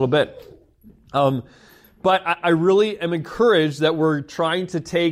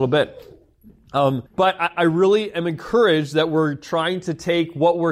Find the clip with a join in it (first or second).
second